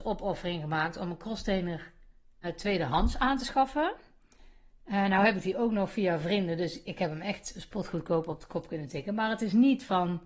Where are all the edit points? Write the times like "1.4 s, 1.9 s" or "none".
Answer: 2.4 s, 6.8 s